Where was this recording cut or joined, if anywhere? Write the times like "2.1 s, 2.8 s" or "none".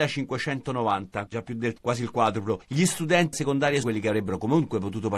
1.3 s, 1.8 s, 3.3 s, 3.8 s